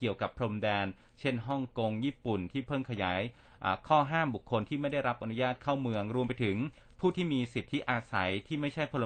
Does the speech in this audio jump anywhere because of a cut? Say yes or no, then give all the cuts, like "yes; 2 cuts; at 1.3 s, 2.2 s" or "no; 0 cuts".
no; 0 cuts